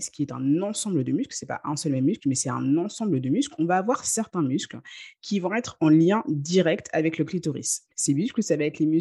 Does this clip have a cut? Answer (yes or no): yes